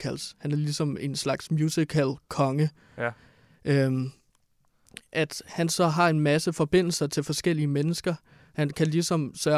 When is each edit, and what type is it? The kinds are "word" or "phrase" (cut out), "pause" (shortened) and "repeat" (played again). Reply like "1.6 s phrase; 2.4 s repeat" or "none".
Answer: none